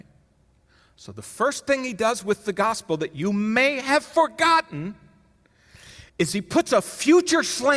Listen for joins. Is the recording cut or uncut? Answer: cut